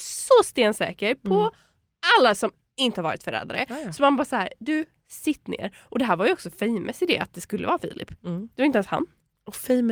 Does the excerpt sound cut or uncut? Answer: uncut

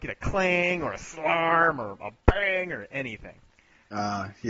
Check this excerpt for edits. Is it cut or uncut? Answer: uncut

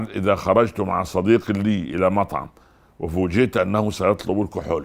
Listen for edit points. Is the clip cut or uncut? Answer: uncut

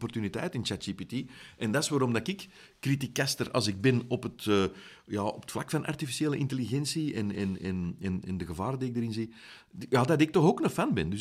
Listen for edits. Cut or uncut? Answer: uncut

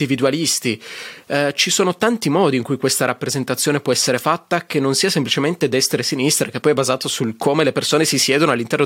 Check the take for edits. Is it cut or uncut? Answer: uncut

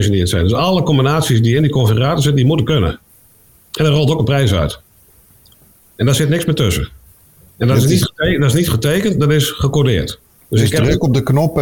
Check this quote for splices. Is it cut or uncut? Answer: uncut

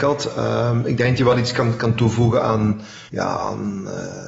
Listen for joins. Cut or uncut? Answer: cut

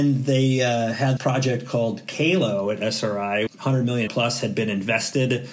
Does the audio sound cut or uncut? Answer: cut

